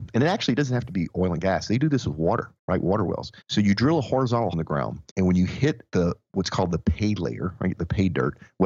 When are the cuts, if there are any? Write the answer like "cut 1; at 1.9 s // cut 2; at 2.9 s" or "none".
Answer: cut 1; at 2.6 s // cut 2; at 3.4 s // cut 3; at 4.5 s // cut 4; at 5.1 s // cut 5; at 5.9 s